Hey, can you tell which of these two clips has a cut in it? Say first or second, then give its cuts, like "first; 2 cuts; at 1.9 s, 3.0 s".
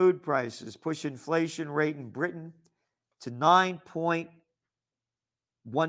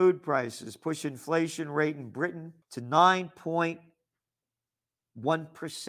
second; 1 cut; at 2.6 s